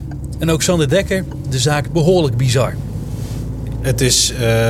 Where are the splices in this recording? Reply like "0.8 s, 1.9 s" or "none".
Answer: 1.4 s, 1.8 s